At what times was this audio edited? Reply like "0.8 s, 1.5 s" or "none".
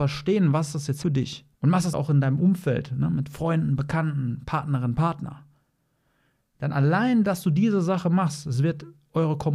1.0 s, 1.5 s, 1.9 s